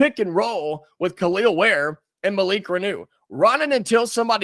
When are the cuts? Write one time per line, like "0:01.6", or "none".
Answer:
none